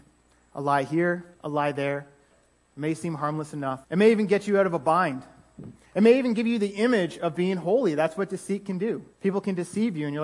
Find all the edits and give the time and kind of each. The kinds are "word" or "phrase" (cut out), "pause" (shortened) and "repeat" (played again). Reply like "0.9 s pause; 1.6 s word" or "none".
1.3 s pause; 3.8 s pause; 9.1 s pause